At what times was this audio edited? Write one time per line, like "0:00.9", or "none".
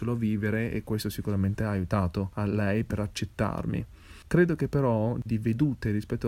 0:05.3